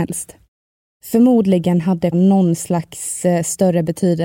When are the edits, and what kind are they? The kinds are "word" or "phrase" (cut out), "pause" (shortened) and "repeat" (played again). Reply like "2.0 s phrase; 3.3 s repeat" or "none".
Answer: 2.1 s word